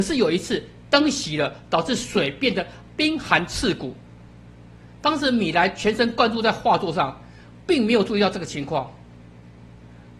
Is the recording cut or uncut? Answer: uncut